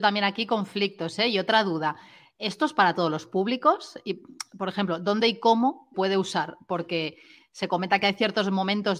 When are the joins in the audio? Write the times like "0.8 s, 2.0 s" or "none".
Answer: 5.9 s